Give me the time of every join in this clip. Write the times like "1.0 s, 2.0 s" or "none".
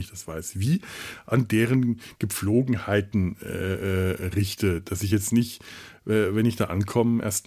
none

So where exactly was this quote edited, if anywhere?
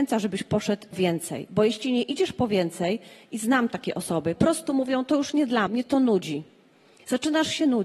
0.9 s, 4.4 s, 5.7 s

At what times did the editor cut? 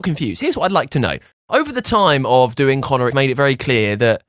1.3 s, 3.1 s

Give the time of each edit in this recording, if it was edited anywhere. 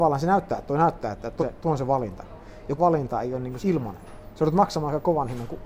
1.4 s, 2.8 s, 3.6 s

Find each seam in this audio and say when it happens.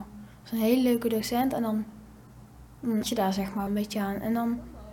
3.0 s, 3.7 s

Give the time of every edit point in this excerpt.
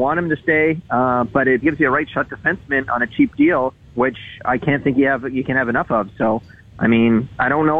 1.6 s, 3.8 s

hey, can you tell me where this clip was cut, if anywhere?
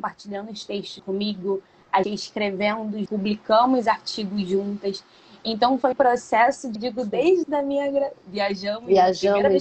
1.0 s, 2.0 s, 3.1 s, 5.9 s, 6.8 s, 7.4 s

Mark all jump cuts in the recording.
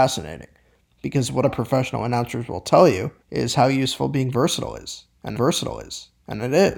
1.4 s, 3.2 s, 5.4 s

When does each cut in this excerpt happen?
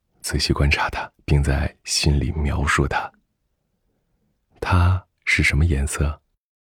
1.1 s, 5.2 s

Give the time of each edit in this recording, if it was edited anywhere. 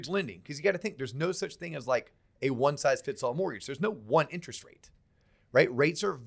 none

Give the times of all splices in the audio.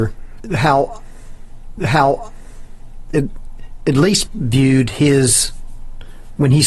1.8 s, 4.3 s

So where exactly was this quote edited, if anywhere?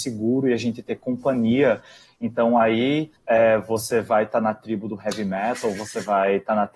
3.2 s

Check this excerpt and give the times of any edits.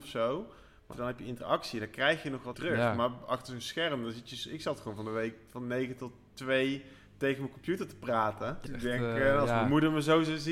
0.9 s, 2.5 s, 8.7 s

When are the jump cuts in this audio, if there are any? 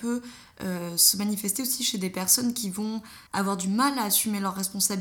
3.3 s

